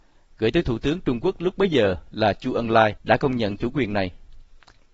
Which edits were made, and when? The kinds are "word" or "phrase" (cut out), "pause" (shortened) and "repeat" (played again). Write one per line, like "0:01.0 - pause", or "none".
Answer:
0:03.0 - pause